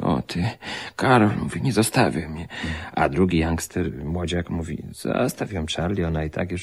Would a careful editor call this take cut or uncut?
uncut